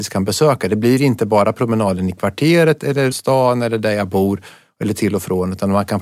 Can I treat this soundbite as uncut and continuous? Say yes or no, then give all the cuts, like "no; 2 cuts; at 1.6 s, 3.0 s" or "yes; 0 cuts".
no; 1 cut; at 3.1 s